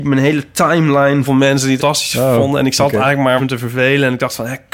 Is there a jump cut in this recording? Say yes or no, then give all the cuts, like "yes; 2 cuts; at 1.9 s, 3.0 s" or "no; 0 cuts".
yes; 3 cuts; at 1.2 s, 1.8 s, 3.4 s